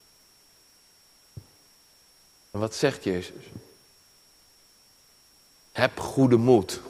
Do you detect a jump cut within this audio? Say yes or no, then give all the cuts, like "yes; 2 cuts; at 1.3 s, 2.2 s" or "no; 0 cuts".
no; 0 cuts